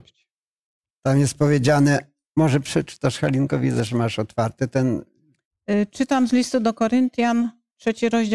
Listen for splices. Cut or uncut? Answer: uncut